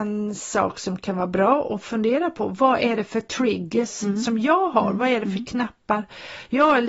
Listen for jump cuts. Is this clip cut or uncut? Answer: uncut